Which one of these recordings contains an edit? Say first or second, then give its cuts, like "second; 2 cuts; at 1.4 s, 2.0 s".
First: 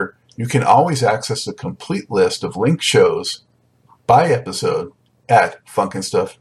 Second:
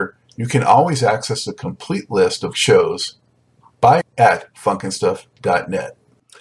second; 2 cuts; at 2.5 s, 4.0 s